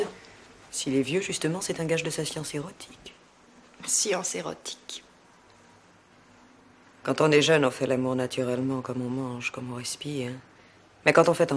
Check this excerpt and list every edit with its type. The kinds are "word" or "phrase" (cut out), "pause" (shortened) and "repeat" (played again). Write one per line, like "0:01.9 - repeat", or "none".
none